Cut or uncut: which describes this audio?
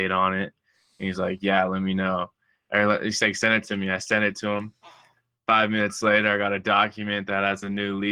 uncut